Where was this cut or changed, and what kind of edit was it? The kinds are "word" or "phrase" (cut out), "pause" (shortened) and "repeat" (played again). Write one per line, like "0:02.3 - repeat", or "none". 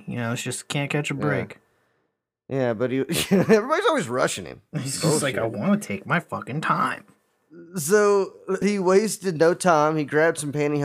0:08.6 - word